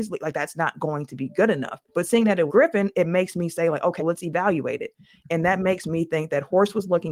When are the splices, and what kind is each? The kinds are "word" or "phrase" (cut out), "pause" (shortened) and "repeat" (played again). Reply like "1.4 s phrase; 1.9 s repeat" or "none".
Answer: 1.9 s pause; 2.5 s word; 4.0 s word